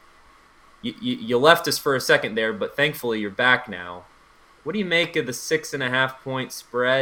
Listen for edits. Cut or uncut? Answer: uncut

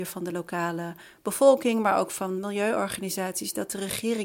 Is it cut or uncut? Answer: uncut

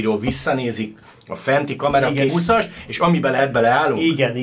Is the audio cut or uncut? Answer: cut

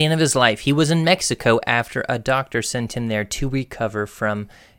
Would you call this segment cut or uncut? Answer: uncut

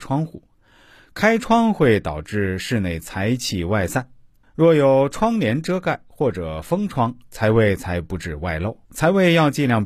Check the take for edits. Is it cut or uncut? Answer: cut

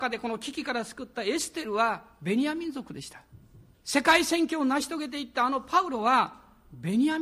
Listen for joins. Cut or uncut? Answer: cut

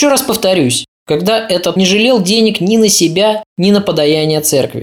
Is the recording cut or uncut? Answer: cut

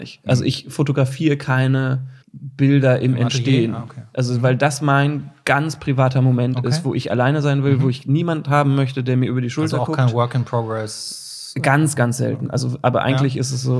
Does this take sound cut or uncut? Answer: cut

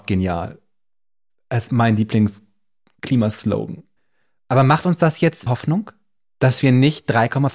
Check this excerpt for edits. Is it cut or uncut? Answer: cut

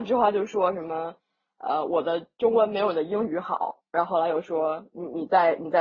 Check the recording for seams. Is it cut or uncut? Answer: uncut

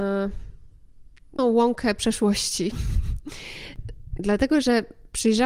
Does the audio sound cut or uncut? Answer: cut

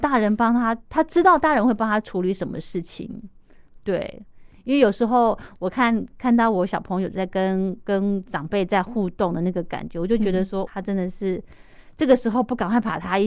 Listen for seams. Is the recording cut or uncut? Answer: cut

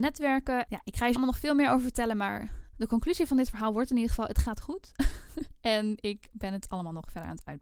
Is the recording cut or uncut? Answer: cut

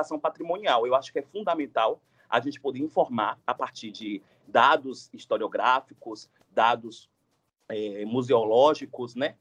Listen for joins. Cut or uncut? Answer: uncut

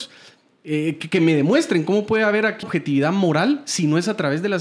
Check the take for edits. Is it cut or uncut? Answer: cut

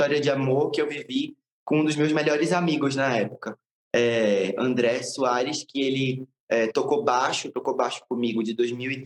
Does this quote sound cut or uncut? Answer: uncut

